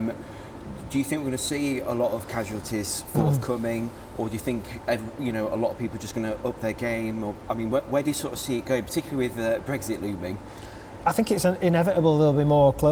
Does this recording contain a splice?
no; 0 cuts

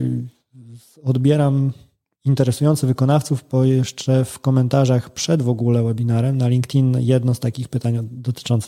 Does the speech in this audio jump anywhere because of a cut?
no; 0 cuts

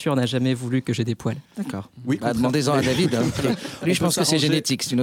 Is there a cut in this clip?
yes; 1 cut; at 1.4 s

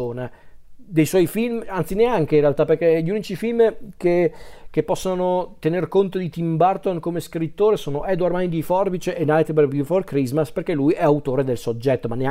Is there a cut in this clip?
no; 0 cuts

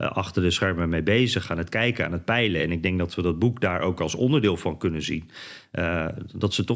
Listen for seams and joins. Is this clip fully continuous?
yes; 0 cuts

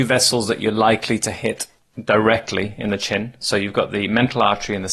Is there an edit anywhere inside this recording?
no; 0 cuts

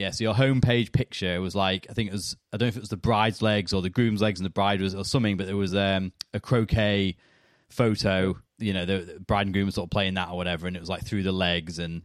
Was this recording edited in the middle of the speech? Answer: no; 0 cuts

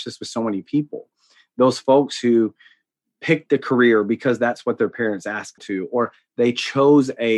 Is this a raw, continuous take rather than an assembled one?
no; 1 cut; at 5.6 s

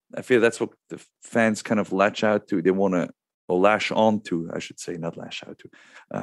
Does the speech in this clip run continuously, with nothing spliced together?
yes; 0 cuts

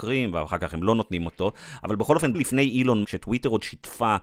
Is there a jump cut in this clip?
yes; 2 cuts; at 2.3 s, 3.0 s

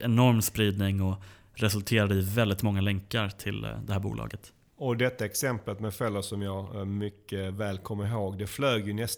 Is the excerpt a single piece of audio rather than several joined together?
yes; 0 cuts

